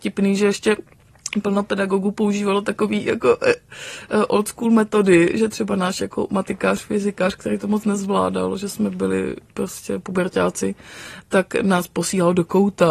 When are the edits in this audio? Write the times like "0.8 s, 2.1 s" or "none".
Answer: none